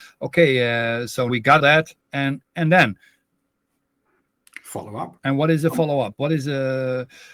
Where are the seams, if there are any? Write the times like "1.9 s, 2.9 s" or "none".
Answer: 1.3 s, 1.6 s, 2.0 s, 5.2 s